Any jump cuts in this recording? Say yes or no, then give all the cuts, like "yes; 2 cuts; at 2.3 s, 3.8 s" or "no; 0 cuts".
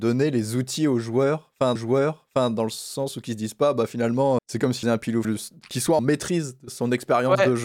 yes; 5 cuts; at 1.8 s, 4.4 s, 4.8 s, 5.2 s, 6.0 s